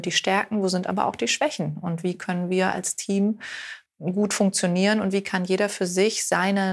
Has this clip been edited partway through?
yes; 1 cut; at 3.9 s

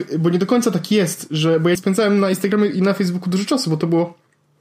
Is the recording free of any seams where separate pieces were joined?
no; 1 cut; at 1.7 s

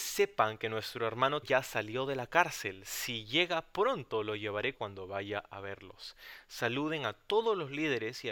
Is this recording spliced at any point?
yes; 2 cuts; at 1.4 s, 4.7 s

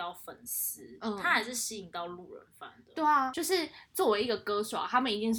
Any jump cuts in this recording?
no; 0 cuts

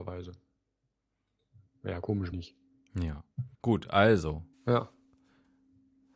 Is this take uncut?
no; 3 cuts; at 2.3 s, 3.5 s, 4.5 s

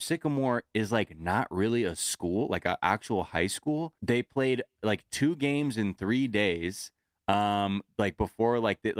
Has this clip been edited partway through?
yes; 1 cut; at 4.0 s

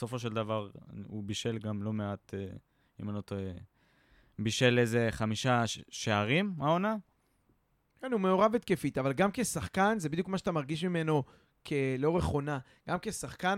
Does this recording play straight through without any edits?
yes; 0 cuts

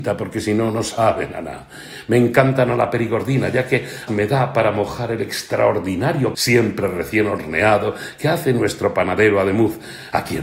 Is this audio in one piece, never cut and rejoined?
no; 2 cuts; at 4.1 s, 6.3 s

